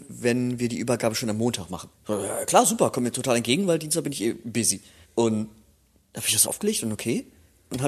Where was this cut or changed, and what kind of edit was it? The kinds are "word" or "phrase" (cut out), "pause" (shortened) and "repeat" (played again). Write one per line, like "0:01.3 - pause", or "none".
0:06.5 - phrase

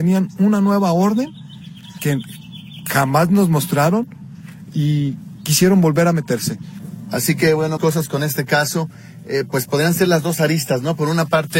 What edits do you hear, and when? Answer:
0:07.8 - phrase

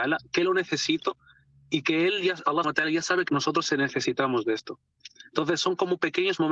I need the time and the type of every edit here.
0:02.6 - word
0:03.3 - word

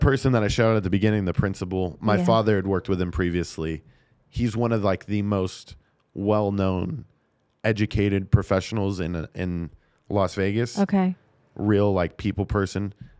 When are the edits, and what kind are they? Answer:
none

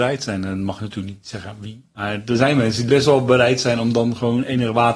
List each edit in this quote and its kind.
0:01.2 - word
0:02.9 - word

